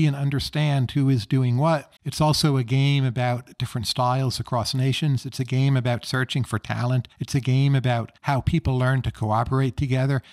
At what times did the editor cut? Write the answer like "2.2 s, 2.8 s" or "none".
2.0 s, 7.1 s, 8.2 s